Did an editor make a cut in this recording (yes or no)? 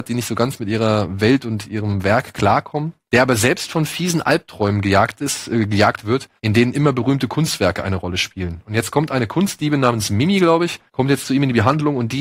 yes